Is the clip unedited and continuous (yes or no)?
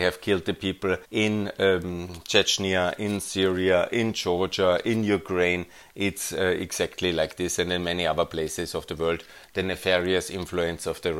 no